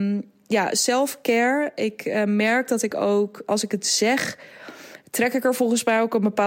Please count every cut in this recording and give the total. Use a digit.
1